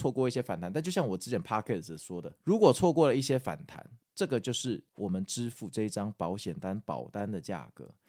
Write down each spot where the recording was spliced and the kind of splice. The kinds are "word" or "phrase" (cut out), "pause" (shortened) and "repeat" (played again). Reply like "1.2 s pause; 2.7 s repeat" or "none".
2.4 s pause; 4.0 s pause; 4.9 s pause